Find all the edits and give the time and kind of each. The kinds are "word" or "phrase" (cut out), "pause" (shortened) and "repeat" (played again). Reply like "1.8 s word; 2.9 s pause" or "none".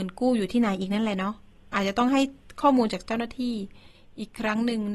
none